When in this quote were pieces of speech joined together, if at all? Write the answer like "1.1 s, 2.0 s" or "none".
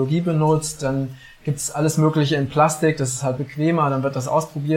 none